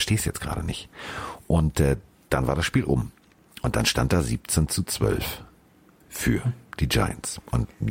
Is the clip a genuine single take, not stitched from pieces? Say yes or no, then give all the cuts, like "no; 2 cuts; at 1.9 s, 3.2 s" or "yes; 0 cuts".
yes; 0 cuts